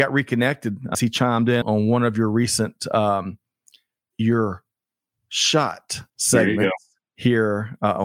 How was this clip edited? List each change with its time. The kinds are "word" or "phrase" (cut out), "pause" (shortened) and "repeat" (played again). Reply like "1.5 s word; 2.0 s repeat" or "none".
0.9 s word; 1.6 s word; 4.1 s word; 6.1 s pause